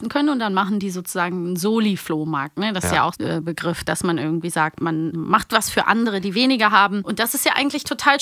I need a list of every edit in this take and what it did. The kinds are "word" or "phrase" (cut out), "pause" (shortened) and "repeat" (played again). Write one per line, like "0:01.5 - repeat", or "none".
0:03.1 - word
0:05.1 - word